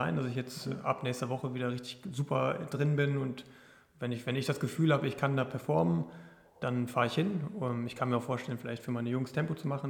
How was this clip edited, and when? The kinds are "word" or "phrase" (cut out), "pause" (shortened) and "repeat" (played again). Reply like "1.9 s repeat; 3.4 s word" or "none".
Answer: none